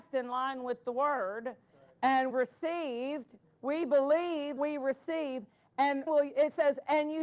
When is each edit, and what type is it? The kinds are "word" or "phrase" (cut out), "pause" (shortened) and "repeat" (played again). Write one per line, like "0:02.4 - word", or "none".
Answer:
0:02.3 - word
0:04.6 - word
0:06.1 - word